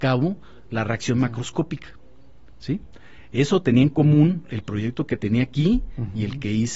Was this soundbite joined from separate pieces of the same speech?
no; 0 cuts

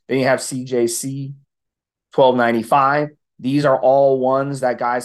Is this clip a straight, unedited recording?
yes; 0 cuts

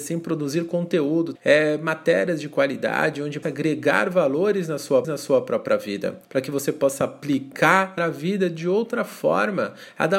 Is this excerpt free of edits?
no; 5 cuts; at 1.3 s, 3.4 s, 5.0 s, 6.2 s, 8.0 s

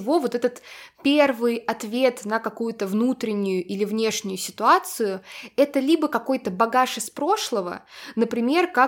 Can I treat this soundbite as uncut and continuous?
yes; 0 cuts

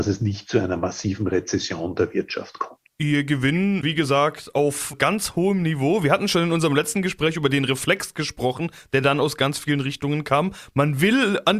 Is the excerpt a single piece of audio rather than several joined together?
no; 2 cuts; at 2.9 s, 4.9 s

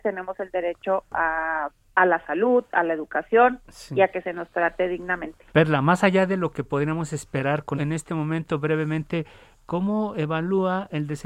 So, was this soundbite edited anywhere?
yes; 3 cuts; at 1.8 s, 5.5 s, 7.8 s

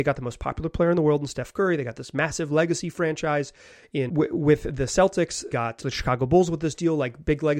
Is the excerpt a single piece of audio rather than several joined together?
no; 3 cuts; at 4.1 s, 5.5 s, 5.8 s

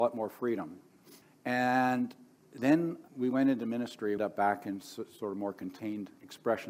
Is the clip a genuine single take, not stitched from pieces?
no; 3 cuts; at 1.2 s, 3.1 s, 4.2 s

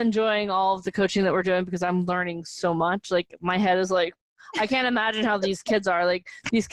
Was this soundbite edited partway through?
no; 0 cuts

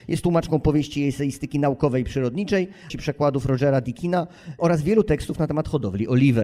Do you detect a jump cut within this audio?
yes; 1 cut; at 2.9 s

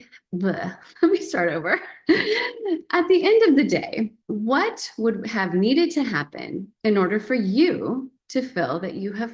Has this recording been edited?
yes; 2 cuts; at 4.2 s, 6.8 s

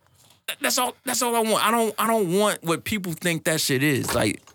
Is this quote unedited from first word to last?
yes; 0 cuts

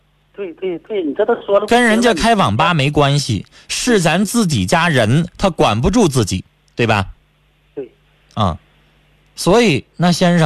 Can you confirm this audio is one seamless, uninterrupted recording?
yes; 0 cuts

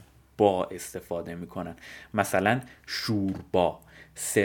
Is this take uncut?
yes; 0 cuts

